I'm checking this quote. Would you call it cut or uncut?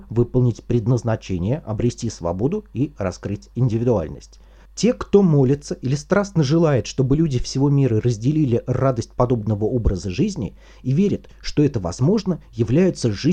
uncut